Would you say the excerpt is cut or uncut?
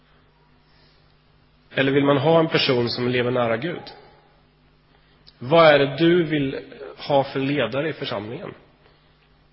uncut